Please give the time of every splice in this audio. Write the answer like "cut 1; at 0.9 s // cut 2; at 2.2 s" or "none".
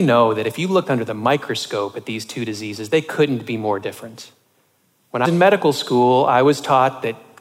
cut 1; at 5.2 s

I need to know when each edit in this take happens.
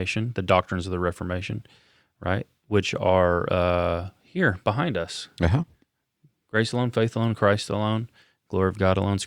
none

